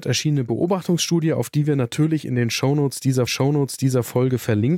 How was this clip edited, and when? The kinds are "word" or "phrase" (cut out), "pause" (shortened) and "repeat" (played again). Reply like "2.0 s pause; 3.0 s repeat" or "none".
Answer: 3.3 s repeat